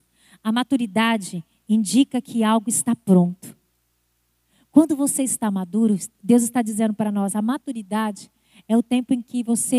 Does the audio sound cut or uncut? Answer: uncut